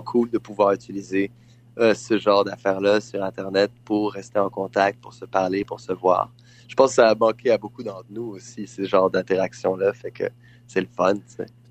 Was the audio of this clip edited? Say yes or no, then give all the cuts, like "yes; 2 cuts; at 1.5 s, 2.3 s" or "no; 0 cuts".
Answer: no; 0 cuts